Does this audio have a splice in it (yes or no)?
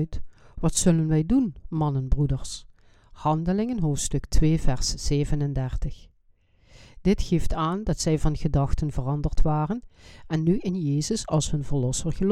no